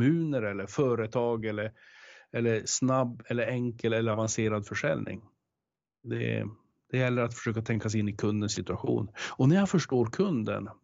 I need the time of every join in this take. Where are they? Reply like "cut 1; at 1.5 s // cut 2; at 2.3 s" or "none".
none